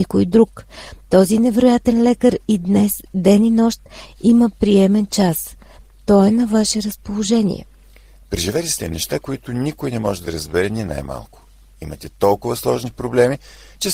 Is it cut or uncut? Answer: uncut